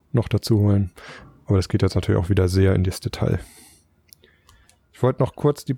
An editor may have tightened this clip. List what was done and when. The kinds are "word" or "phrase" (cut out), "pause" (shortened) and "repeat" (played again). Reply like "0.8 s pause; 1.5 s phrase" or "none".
none